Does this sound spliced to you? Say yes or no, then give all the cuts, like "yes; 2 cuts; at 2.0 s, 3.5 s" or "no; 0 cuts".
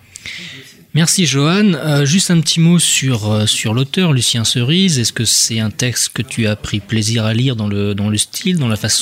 no; 0 cuts